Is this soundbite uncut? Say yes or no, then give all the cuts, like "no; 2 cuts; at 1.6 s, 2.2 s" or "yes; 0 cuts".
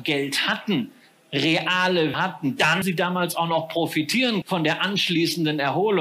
no; 3 cuts; at 2.1 s, 2.8 s, 4.4 s